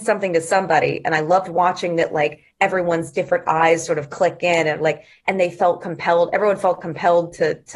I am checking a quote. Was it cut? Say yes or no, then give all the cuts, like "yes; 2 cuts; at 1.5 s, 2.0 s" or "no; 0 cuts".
no; 0 cuts